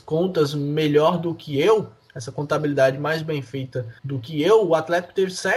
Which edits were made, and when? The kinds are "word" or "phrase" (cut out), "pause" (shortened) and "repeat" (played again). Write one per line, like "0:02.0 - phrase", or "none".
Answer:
0:04.0 - pause

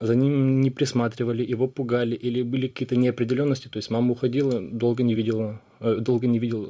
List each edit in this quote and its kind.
none

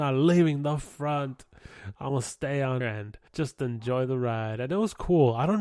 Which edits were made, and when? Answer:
0:02.8 - word
0:03.3 - pause

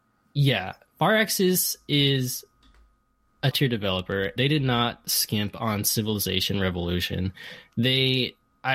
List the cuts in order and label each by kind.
0:03.5 - word
0:04.4 - word

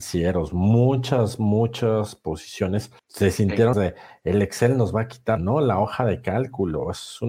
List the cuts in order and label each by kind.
0:03.0 - pause
0:03.7 - word
0:05.4 - phrase

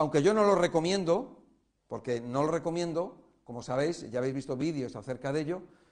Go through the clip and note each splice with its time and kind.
none

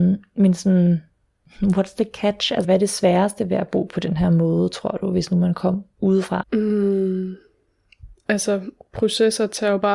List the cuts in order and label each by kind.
none

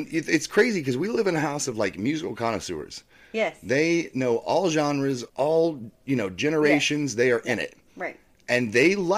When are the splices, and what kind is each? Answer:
0:05.3 - pause

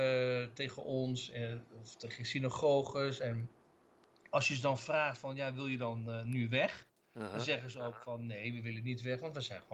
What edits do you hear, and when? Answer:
none

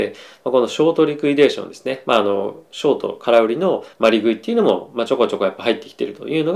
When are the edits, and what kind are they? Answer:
0:03.9 - pause

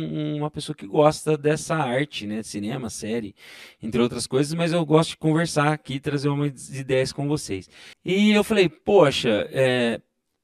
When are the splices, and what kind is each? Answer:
0:07.9 - pause

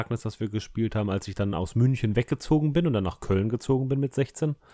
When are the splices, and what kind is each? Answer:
none

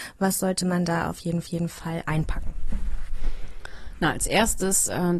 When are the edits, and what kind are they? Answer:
0:01.4 - repeat

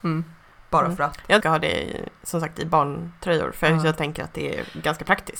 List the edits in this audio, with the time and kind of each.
0:01.4 - phrase

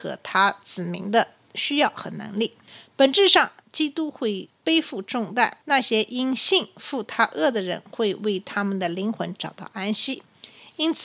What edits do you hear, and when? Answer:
0:03.6 - pause
0:05.6 - pause

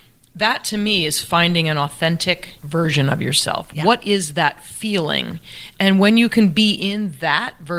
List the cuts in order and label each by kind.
0:02.6 - pause

